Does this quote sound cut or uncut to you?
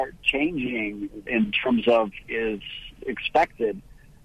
cut